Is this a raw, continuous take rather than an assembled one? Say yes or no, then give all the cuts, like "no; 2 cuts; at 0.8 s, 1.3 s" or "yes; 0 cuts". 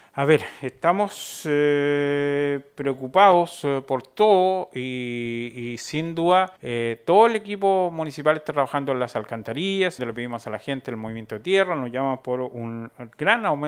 no; 2 cuts; at 6.6 s, 10.0 s